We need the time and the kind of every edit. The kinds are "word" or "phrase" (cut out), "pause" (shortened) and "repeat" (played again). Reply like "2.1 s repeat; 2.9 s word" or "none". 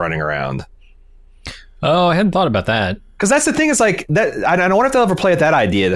none